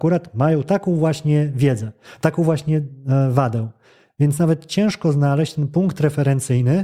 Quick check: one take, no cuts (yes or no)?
yes